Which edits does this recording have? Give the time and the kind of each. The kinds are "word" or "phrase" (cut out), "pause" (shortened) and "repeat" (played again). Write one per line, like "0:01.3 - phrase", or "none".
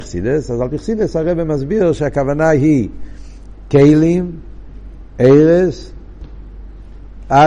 none